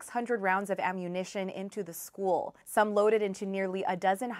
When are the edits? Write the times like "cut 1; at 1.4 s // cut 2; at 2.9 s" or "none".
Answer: cut 1; at 2.6 s